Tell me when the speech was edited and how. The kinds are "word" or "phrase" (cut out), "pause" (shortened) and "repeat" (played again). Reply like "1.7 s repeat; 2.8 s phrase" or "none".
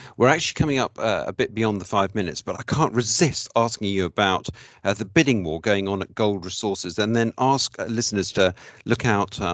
2.5 s word